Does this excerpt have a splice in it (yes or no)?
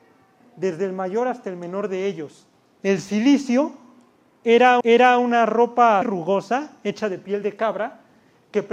yes